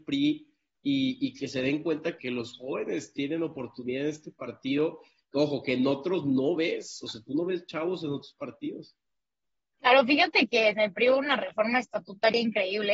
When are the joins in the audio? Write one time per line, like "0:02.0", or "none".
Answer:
0:02.2